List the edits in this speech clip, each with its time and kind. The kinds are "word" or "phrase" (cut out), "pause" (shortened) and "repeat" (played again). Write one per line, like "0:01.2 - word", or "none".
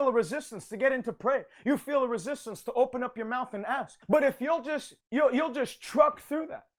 0:04.0 - pause
0:05.0 - pause